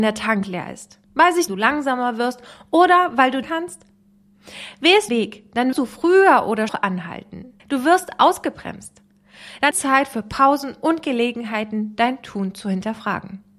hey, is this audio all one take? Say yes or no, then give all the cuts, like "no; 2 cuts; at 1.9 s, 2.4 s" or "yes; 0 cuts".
no; 8 cuts; at 1.0 s, 1.5 s, 3.4 s, 5.1 s, 5.7 s, 6.7 s, 7.6 s, 9.7 s